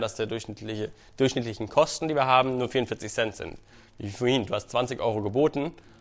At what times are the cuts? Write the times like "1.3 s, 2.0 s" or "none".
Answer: none